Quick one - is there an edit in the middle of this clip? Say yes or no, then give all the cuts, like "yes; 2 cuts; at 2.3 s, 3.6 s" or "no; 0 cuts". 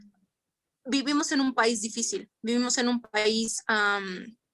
no; 0 cuts